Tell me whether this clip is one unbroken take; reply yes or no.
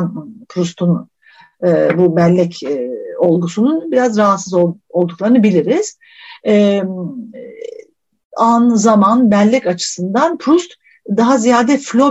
yes